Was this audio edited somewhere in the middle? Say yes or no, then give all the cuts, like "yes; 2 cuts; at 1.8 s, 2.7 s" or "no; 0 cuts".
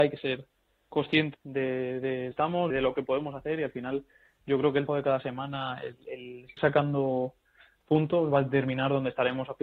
yes; 5 cuts; at 1.3 s, 2.3 s, 2.7 s, 4.9 s, 6.6 s